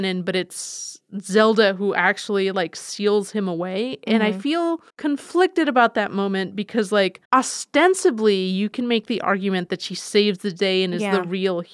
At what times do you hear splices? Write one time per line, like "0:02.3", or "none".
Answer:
0:04.9
0:07.2